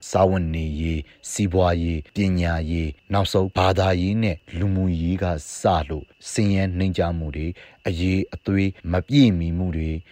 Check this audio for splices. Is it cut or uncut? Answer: cut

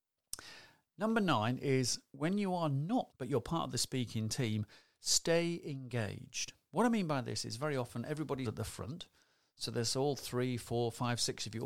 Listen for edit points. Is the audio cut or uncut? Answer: cut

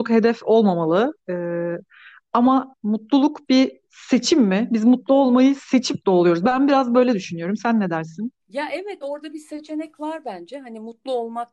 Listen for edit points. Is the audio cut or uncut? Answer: cut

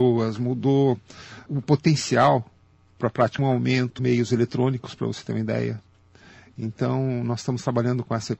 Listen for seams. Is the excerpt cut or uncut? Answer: cut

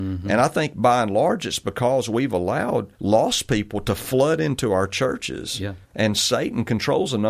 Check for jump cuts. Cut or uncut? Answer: cut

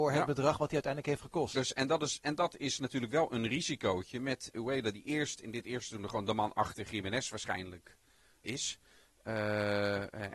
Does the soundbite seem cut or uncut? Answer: cut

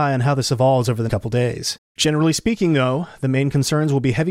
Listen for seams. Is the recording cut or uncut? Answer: cut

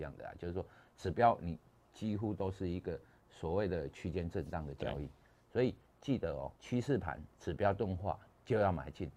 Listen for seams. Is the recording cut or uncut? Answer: cut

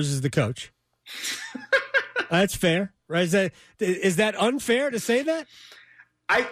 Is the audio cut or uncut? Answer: uncut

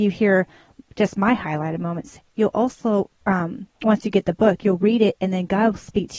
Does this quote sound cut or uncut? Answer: uncut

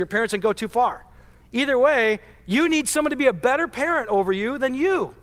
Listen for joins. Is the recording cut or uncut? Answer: uncut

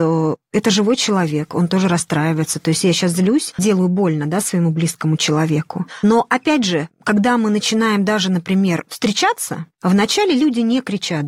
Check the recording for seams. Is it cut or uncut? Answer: cut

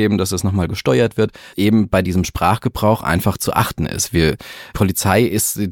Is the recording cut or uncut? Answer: cut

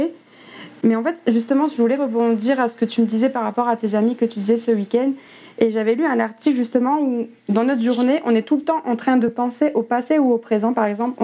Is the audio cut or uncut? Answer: uncut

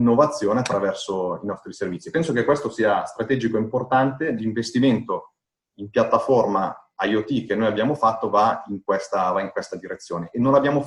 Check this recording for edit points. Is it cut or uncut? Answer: uncut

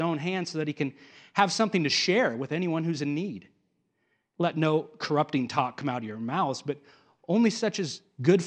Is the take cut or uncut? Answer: uncut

